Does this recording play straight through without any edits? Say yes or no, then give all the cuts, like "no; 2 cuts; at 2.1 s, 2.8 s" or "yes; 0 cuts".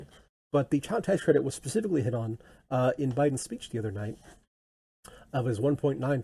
yes; 0 cuts